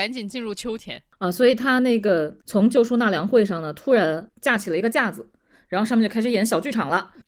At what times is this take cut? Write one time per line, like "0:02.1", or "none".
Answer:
0:02.4